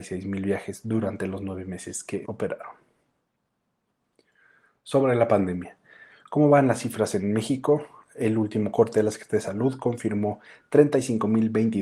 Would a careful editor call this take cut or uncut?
cut